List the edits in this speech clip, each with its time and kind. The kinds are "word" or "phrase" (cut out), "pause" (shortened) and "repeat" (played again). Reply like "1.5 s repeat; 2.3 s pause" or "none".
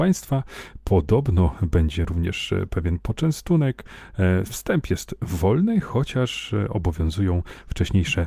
none